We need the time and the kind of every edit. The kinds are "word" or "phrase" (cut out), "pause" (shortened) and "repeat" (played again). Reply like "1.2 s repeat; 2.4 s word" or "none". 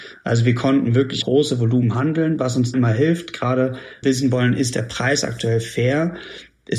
1.2 s word; 2.7 s word; 4.0 s phrase